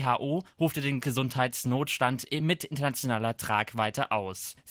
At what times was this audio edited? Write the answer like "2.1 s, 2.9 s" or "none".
none